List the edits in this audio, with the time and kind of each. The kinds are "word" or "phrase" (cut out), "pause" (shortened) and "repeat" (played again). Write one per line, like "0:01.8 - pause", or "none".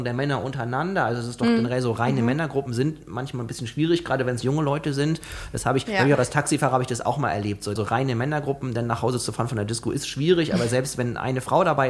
0:07.8 - phrase

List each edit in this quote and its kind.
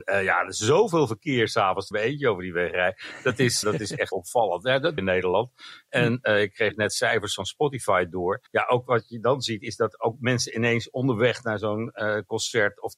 0:01.9 - phrase
0:03.6 - word
0:04.1 - word
0:05.0 - phrase
0:08.5 - pause

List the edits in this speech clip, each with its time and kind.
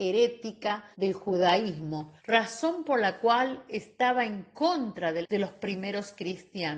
0:00.9 - pause
0:02.2 - pause
0:05.2 - phrase

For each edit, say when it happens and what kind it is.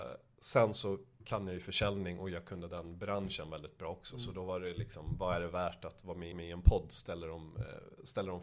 0:06.3 - repeat

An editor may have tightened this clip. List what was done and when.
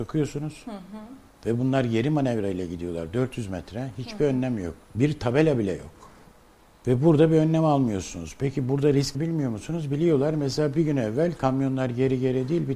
0:04.8 - pause
0:06.6 - pause
0:09.1 - word

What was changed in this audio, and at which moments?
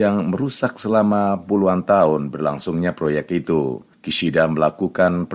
none

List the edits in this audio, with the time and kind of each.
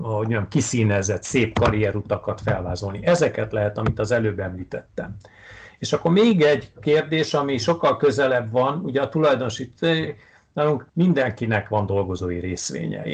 0:10.9 - pause

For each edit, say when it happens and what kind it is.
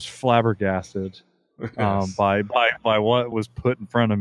0:03.3 - word

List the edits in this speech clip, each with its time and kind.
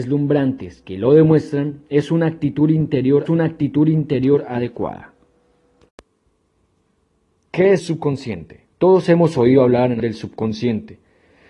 0:03.3 - repeat
0:07.8 - word
0:08.7 - pause
0:10.0 - phrase

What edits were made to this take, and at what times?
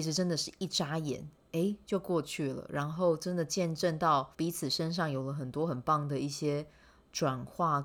0:04.3 - pause

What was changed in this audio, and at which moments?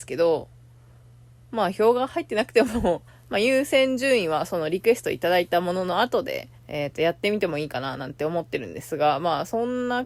0:03.1 - pause
0:06.6 - pause

